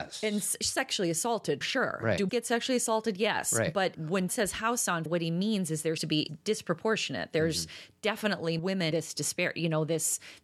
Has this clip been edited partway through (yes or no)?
yes